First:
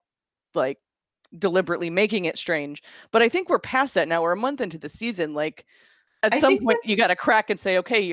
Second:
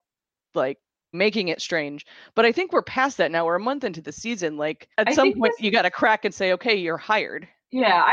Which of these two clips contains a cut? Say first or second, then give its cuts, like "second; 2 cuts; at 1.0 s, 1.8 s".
second; 2 cuts; at 1.1 s, 4.9 s